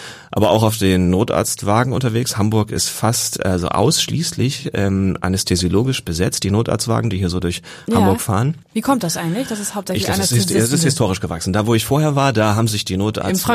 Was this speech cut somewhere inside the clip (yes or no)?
yes